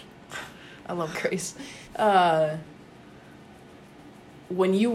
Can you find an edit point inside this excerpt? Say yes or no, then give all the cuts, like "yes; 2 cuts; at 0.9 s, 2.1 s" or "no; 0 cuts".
yes; 2 cuts; at 1.1 s, 1.8 s